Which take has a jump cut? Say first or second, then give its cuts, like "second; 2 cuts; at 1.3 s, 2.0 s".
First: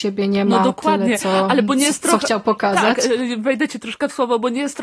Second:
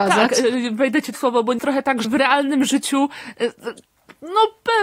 second; 3 cuts; at 1.1 s, 1.6 s, 2.0 s